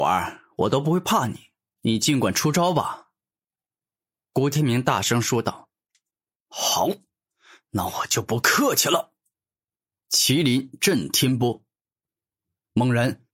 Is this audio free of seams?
yes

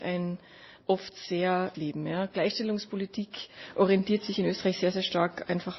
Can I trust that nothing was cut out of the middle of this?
no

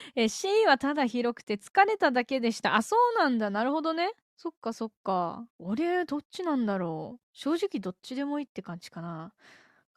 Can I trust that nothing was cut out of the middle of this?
no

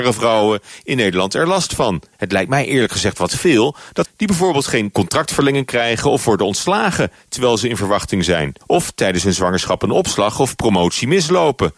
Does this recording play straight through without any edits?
no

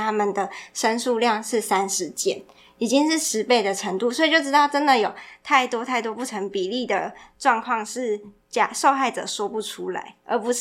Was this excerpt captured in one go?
yes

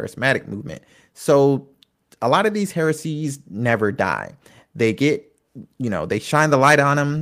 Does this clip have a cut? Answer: no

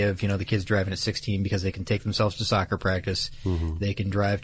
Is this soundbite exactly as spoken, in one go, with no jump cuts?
yes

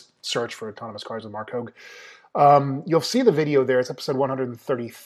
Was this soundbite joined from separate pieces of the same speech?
no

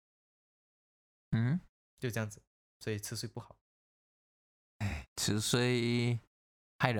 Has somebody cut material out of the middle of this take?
no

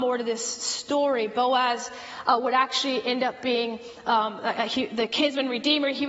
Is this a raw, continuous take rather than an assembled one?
yes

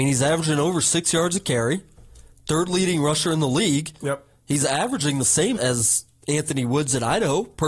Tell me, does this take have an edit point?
yes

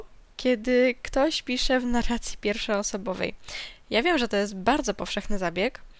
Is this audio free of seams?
yes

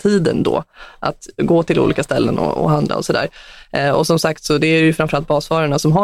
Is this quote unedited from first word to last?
yes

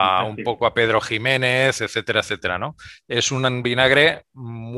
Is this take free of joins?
yes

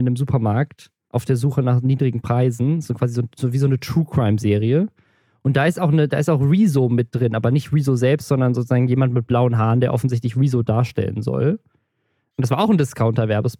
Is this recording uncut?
yes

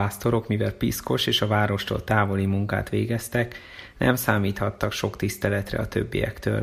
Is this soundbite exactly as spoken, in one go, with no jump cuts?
yes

